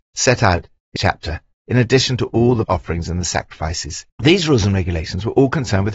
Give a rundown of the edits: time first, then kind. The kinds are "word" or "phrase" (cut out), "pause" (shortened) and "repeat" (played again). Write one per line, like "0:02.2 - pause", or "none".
0:01.0 - word
0:02.6 - word
0:04.1 - pause